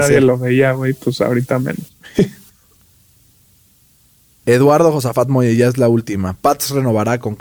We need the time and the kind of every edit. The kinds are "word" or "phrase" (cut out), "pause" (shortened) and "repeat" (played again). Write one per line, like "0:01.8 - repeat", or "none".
0:02.7 - pause